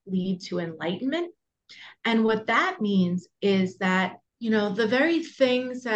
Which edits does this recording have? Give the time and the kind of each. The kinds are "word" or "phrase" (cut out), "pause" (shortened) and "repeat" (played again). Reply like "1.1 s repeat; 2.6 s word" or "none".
4.3 s pause